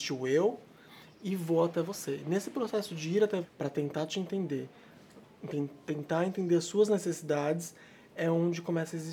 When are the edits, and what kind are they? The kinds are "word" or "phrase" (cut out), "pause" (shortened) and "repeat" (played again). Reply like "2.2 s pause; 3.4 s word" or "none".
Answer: 3.4 s word